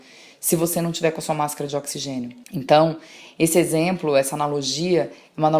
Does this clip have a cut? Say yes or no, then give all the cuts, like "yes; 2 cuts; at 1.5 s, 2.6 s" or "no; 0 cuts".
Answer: yes; 1 cut; at 2.4 s